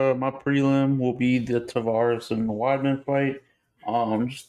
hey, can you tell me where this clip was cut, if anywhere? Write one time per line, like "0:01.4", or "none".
none